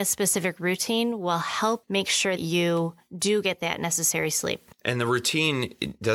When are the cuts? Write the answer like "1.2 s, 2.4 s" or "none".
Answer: 1.8 s, 2.4 s, 4.7 s